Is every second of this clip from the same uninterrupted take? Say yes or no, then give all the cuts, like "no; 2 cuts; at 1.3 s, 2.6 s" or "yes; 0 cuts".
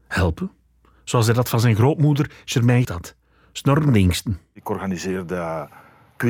no; 1 cut; at 2.8 s